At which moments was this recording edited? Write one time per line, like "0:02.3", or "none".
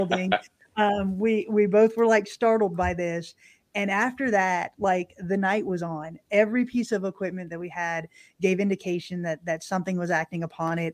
none